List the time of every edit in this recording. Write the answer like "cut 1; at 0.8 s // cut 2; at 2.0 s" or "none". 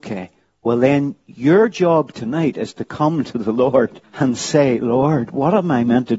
cut 1; at 4.0 s